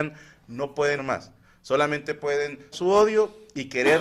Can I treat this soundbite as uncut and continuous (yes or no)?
no